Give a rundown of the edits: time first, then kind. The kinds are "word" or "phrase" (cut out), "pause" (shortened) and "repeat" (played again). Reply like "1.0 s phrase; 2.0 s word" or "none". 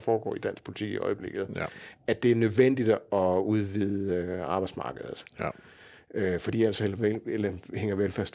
none